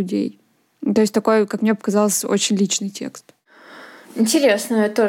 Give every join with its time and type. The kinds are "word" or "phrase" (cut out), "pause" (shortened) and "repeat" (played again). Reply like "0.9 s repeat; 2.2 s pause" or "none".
none